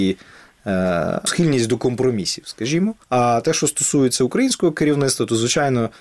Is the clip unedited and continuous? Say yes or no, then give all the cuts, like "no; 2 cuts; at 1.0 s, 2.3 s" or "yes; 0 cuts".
no; 2 cuts; at 1.3 s, 3.0 s